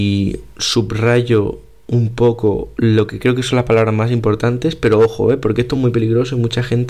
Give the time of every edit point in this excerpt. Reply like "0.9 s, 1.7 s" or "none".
none

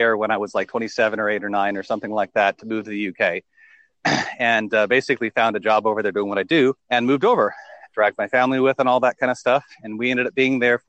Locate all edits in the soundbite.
6.8 s

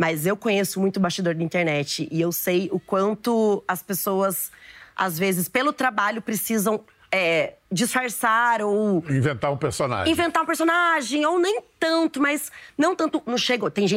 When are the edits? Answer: 7.6 s

